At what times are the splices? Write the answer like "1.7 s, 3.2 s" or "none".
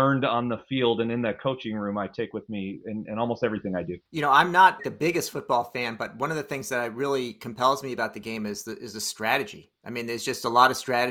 4.1 s, 4.8 s